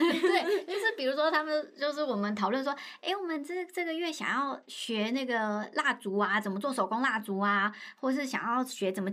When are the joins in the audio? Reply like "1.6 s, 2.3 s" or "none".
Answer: none